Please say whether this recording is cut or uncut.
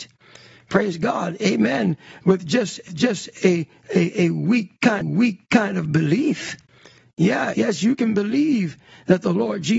cut